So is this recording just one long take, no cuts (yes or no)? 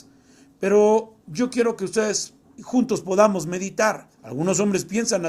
no